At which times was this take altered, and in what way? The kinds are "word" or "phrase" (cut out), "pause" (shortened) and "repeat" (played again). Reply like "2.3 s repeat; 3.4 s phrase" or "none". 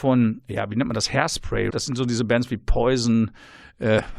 1.7 s word